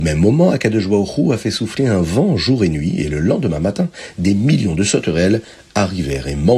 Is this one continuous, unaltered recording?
yes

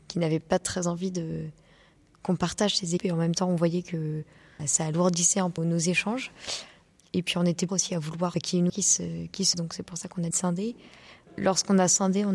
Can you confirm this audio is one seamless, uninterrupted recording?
no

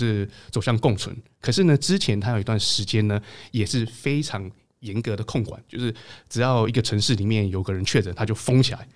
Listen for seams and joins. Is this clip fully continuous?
yes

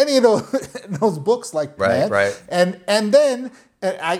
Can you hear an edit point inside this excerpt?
yes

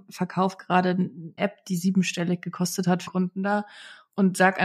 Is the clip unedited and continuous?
no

